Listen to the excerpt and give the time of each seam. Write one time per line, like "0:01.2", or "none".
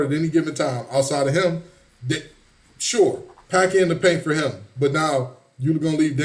none